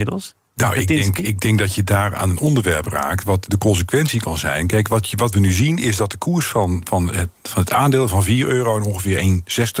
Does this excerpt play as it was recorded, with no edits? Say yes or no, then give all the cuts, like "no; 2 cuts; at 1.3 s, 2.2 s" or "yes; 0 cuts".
yes; 0 cuts